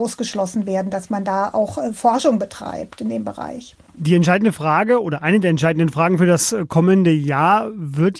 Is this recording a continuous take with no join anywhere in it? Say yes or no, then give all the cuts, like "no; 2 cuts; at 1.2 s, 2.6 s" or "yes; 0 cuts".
yes; 0 cuts